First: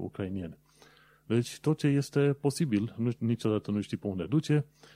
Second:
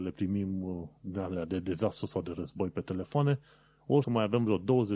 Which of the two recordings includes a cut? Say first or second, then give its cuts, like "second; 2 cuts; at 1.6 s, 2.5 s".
second; 2 cuts; at 1.0 s, 4.0 s